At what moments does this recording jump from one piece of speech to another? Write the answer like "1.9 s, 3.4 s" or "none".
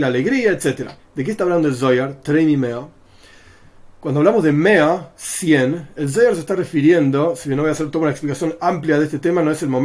1.0 s